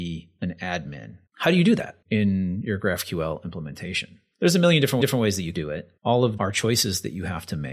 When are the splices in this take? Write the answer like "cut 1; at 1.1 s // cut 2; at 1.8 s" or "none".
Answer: cut 1; at 1.3 s // cut 2; at 2.0 s // cut 3; at 5.0 s // cut 4; at 5.5 s // cut 5; at 6.0 s // cut 6; at 6.4 s